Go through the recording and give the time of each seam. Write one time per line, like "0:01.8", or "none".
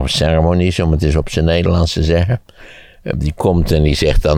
none